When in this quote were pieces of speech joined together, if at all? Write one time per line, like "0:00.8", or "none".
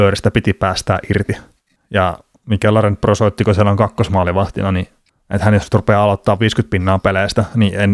none

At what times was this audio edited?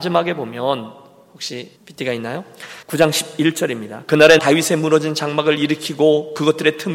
0:01.8
0:02.8
0:04.4

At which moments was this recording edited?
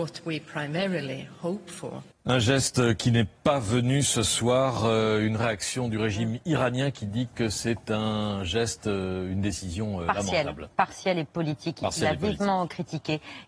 0:02.1
0:10.7

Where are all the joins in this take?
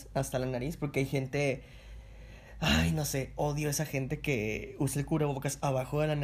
none

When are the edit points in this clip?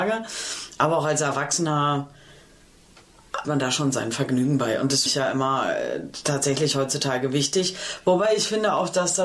0:03.4
0:05.1

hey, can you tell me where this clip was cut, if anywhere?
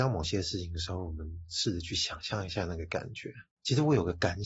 0:03.5

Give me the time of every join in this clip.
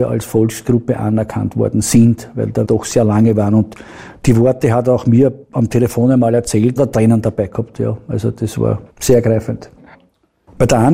0:02.6
0:05.4
0:06.8
0:08.9

